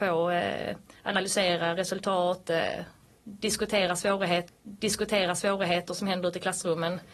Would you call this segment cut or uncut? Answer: cut